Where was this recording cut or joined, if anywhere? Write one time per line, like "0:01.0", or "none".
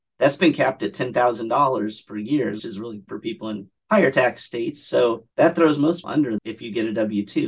0:02.6
0:03.1
0:03.8
0:05.3
0:06.0
0:06.4